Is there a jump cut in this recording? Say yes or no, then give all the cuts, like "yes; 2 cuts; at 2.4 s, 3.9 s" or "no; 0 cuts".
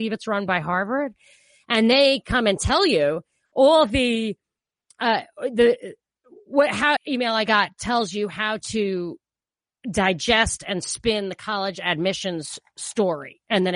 yes; 1 cut; at 7.0 s